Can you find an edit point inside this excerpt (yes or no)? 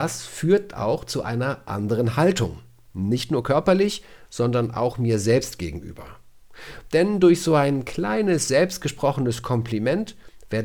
no